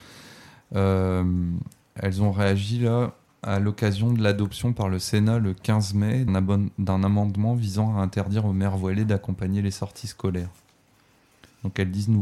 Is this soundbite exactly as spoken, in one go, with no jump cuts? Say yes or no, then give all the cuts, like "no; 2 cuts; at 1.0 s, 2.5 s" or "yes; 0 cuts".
no; 1 cut; at 6.3 s